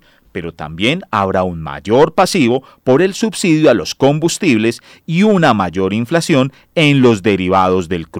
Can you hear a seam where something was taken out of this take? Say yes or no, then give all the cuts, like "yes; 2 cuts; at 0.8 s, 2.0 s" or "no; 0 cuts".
no; 0 cuts